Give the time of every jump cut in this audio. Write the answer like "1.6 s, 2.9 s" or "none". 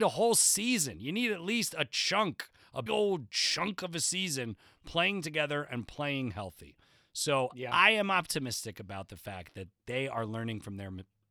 2.9 s